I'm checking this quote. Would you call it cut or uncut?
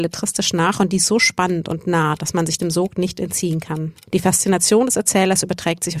cut